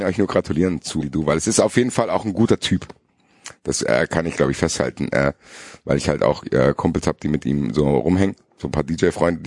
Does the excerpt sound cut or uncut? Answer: cut